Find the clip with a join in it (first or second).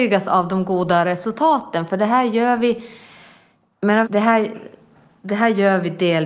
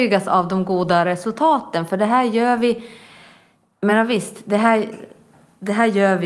first